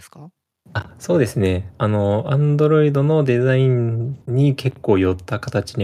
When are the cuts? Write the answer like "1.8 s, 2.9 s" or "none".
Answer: 1.7 s, 4.2 s